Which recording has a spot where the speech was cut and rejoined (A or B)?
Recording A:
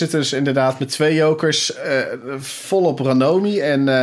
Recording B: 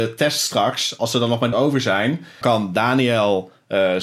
B